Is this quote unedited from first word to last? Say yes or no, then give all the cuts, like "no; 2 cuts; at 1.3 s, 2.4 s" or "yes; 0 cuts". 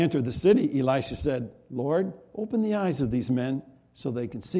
yes; 0 cuts